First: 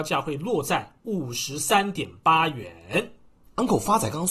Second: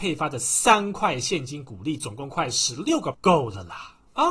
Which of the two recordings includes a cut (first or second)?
second